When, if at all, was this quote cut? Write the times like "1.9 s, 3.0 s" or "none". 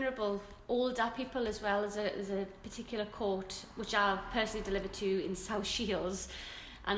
none